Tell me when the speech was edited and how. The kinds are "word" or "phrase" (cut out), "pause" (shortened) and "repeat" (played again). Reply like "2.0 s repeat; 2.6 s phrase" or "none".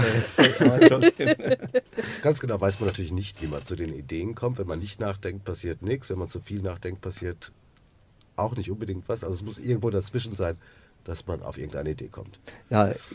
none